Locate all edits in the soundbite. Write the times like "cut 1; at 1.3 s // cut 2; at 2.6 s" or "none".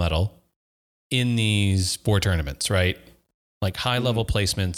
none